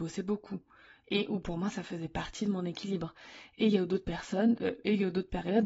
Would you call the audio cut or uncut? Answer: uncut